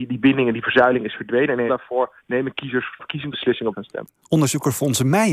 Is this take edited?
yes; 5 cuts; at 1.7 s, 2.2 s, 3.0 s, 3.3 s, 3.7 s

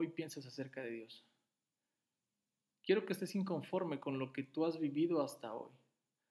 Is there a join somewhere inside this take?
no; 0 cuts

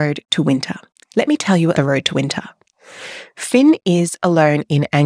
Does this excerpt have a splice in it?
yes; 1 cut; at 1.7 s

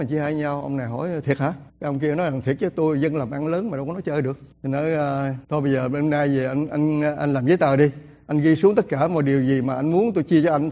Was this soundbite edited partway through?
yes; 3 cuts; at 1.7 s, 4.5 s, 5.4 s

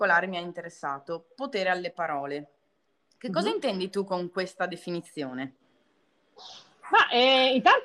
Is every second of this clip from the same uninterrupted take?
yes; 0 cuts

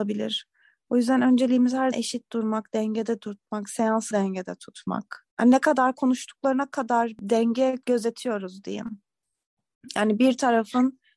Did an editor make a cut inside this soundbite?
yes; 3 cuts; at 1.9 s, 4.1 s, 5.3 s

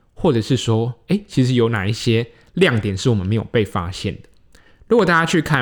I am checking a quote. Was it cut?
no; 0 cuts

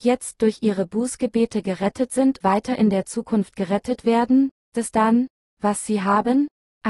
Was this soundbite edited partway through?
yes; 2 cuts; at 2.4 s, 4.7 s

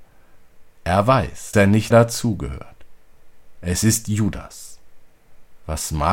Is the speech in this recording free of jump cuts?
no; 2 cuts; at 1.5 s, 1.9 s

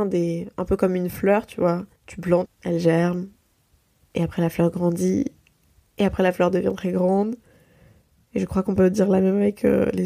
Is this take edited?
yes; 3 cuts; at 2.0 s, 2.5 s, 3.5 s

